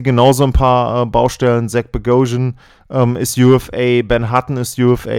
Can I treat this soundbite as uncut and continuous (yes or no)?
yes